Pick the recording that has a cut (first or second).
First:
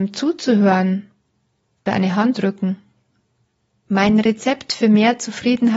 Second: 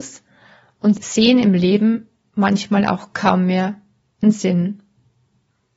first